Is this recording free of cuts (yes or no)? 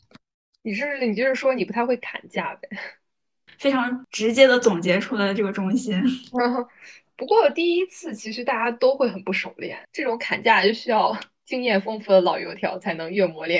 no